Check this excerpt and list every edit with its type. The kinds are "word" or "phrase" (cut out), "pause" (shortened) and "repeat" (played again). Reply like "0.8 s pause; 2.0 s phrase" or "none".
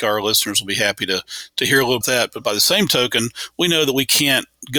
2.0 s phrase